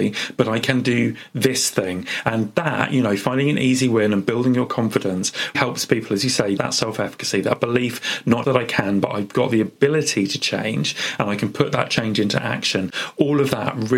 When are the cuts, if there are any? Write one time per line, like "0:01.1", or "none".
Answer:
0:05.5
0:06.6
0:08.4